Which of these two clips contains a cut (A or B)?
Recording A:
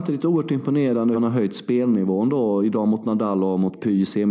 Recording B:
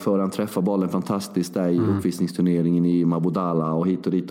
A